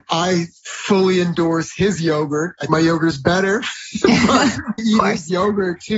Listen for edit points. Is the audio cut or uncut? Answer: cut